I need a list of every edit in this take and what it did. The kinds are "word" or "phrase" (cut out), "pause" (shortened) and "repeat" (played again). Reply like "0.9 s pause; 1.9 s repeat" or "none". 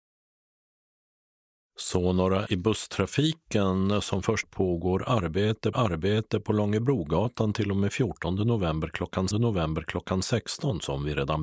2.5 s word; 4.4 s phrase; 5.7 s repeat; 9.3 s repeat